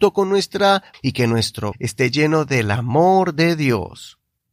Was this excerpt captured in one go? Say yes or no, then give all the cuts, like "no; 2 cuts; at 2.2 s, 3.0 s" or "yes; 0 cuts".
no; 2 cuts; at 0.9 s, 1.7 s